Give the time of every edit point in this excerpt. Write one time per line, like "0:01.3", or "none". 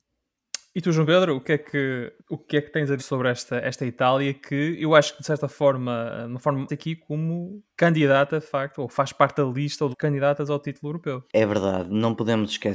0:02.2
0:03.0
0:06.7
0:07.7
0:09.9
0:11.3

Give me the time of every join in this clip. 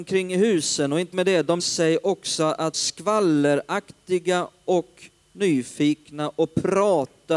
0:01.1
0:01.6
0:02.7

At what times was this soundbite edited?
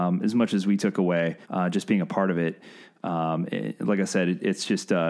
0:01.4

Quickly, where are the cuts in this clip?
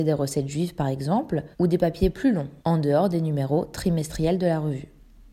0:01.5
0:02.6

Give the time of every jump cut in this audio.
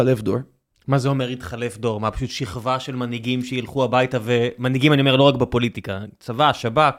none

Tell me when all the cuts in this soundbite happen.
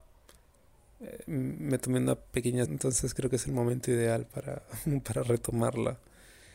0:02.7

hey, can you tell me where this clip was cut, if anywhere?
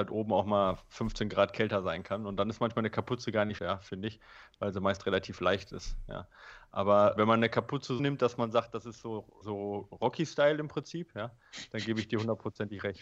0:03.6
0:07.2
0:08.0
0:09.4

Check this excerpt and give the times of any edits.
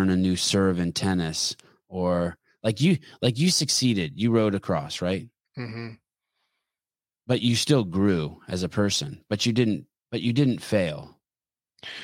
none

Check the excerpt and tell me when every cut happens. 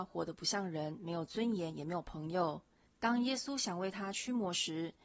0:02.9

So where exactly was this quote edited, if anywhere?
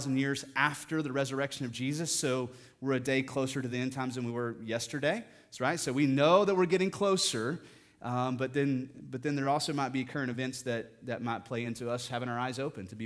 none

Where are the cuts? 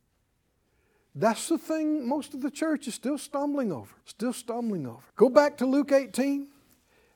0:04.0
0:05.1

